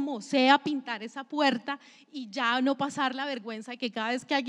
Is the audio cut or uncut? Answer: uncut